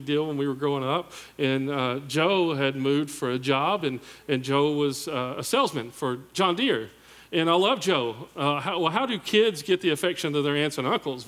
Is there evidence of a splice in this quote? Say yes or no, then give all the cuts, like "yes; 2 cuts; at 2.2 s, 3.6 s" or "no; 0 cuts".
no; 0 cuts